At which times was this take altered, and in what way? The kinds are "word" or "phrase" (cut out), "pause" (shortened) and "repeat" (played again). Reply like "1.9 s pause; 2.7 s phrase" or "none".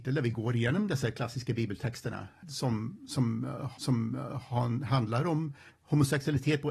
2.4 s word; 3.8 s repeat; 5.7 s pause

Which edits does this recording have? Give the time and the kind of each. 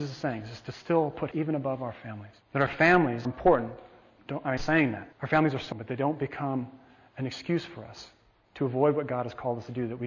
1.3 s phrase; 2.4 s pause; 3.3 s word; 4.6 s phrase; 5.1 s pause; 5.7 s word

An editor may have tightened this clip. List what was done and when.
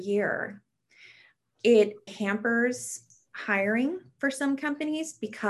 2.1 s word

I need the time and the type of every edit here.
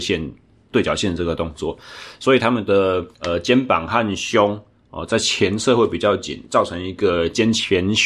3.1 s pause

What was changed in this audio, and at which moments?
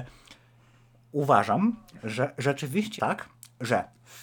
3.0 s word

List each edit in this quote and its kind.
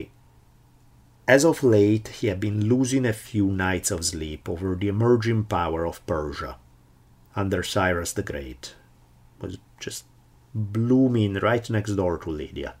none

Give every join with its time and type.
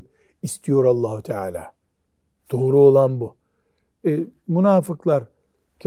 none

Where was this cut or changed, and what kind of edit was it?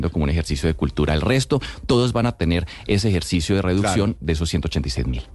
none

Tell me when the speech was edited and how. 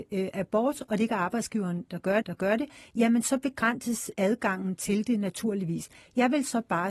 2.2 s repeat

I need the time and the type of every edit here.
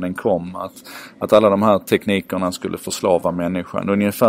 none

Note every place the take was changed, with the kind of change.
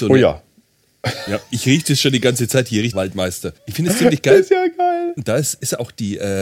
2.9 s phrase; 3.6 s pause

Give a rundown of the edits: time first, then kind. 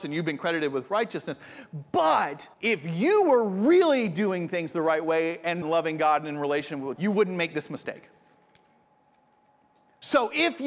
2.5 s pause; 5.6 s phrase; 7.0 s word

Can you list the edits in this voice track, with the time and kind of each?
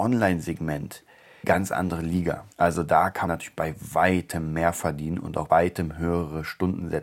1.4 s word; 2.5 s pause; 3.3 s word; 5.5 s word

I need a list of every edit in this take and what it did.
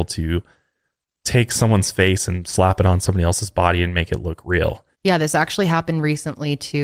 4.9 s pause

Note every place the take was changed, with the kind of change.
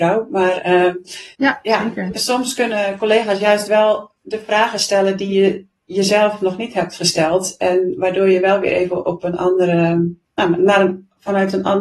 1.3 s pause; 4.2 s pause; 10.2 s pause

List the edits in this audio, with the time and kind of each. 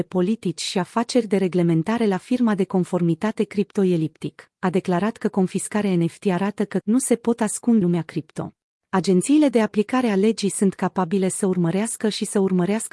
6.8 s word; 7.8 s word; 8.6 s pause

